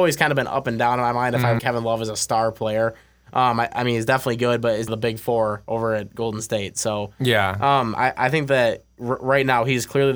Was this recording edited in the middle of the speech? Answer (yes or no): yes